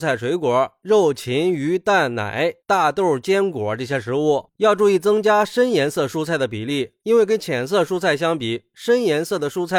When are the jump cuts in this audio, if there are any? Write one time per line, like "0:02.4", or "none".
none